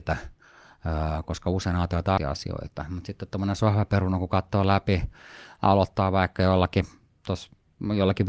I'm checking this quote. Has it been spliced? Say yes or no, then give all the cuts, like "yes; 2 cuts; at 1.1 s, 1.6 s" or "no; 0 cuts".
yes; 1 cut; at 2.2 s